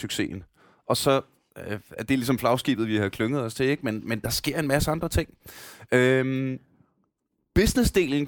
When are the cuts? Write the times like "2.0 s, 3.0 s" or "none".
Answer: none